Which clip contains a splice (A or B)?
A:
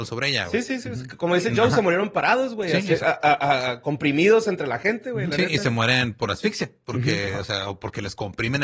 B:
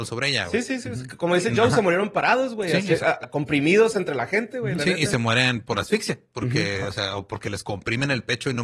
B